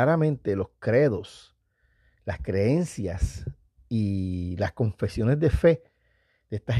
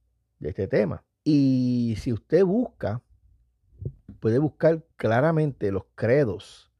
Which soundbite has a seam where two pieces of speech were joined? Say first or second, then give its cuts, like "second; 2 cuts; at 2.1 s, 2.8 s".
second; 3 cuts; at 1.1 s, 4.2 s, 4.9 s